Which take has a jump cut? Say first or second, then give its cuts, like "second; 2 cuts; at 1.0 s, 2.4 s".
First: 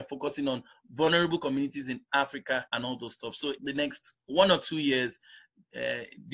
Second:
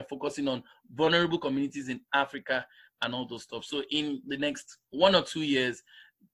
first; 2 cuts; at 2.7 s, 3.6 s